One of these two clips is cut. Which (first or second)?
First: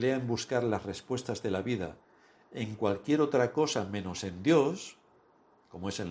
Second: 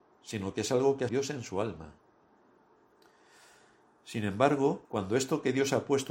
second